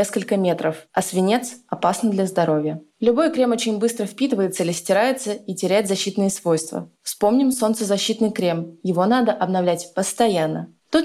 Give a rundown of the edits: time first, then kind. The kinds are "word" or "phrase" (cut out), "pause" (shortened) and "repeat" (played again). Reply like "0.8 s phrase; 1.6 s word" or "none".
none